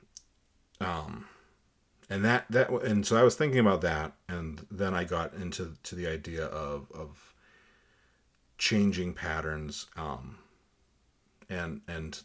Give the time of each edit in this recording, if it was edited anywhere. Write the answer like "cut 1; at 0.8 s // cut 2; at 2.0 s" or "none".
none